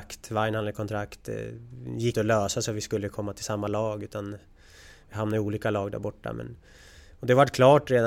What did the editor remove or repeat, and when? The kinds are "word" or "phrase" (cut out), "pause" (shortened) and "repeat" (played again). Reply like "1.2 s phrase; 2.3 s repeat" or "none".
2.1 s word